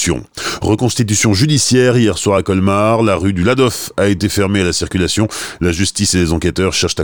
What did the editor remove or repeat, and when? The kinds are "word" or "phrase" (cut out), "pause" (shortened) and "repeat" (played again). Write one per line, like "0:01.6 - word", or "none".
none